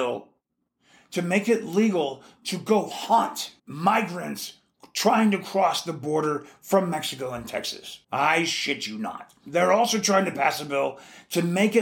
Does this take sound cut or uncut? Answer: cut